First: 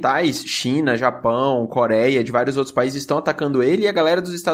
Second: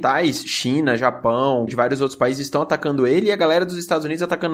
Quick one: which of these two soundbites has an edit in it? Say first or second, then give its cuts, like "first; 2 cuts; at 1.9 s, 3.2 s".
second; 1 cut; at 1.7 s